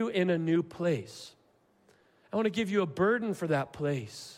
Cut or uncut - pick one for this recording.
uncut